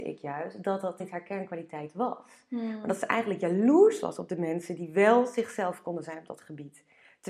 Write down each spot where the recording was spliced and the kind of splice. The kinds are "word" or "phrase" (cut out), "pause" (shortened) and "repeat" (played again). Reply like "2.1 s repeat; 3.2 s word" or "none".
1.0 s word